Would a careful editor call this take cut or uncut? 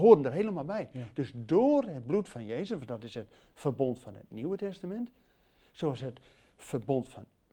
uncut